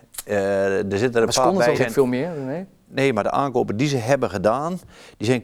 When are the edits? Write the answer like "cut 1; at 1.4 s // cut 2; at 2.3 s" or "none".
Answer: cut 1; at 1.7 s

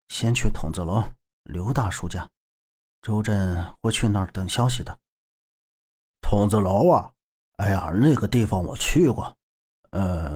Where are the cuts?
none

